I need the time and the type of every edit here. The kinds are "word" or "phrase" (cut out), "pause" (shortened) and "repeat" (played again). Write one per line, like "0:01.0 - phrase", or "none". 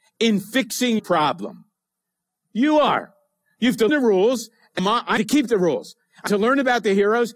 0:01.0 - word
0:03.9 - word
0:04.8 - word
0:05.2 - word
0:06.3 - word